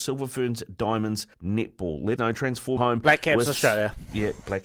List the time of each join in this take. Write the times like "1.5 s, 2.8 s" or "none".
1.3 s, 2.2 s, 2.8 s